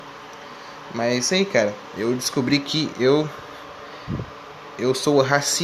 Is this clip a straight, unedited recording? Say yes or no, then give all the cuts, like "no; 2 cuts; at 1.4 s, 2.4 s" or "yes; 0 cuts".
yes; 0 cuts